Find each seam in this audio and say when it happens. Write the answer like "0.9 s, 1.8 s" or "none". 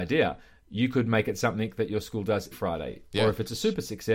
2.5 s